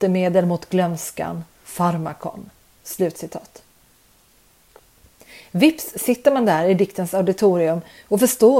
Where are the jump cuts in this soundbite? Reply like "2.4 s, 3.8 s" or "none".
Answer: none